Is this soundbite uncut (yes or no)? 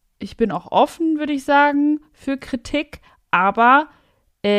yes